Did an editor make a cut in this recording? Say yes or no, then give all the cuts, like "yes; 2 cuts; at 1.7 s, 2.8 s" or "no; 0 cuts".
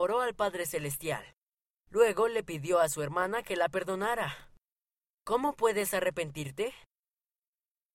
no; 0 cuts